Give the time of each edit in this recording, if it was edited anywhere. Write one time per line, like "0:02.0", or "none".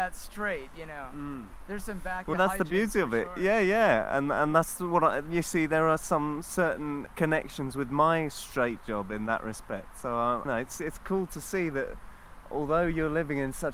0:02.3
0:07.1
0:10.5